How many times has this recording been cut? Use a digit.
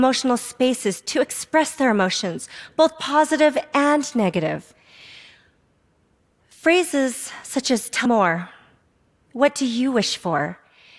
1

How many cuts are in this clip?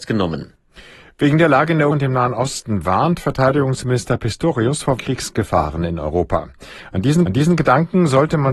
3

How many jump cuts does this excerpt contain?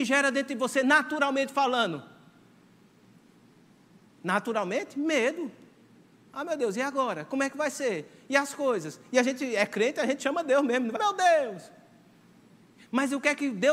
1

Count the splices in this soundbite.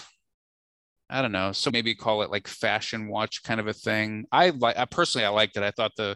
1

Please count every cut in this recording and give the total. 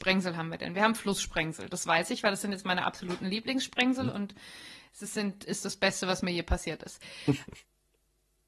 0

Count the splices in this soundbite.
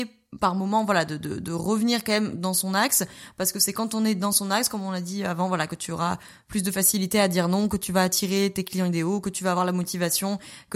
0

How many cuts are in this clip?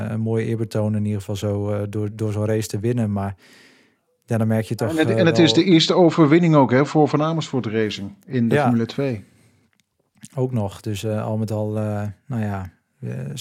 0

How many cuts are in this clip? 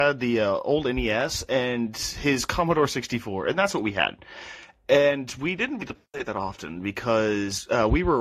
1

